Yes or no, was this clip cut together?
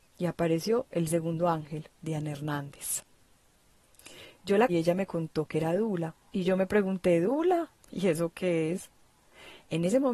yes